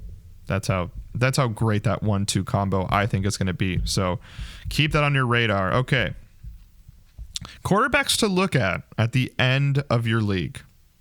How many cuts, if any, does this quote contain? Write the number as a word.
zero